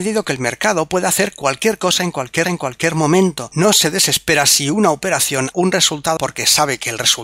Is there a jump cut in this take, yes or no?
yes